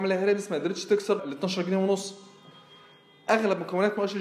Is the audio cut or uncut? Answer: cut